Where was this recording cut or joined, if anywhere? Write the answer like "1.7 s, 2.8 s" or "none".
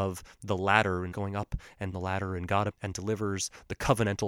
1.1 s, 1.9 s, 2.7 s